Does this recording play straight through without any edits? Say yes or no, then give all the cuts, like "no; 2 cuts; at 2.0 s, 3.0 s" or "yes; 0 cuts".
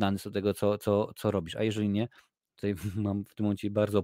yes; 0 cuts